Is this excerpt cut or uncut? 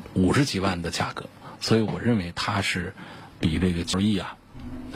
cut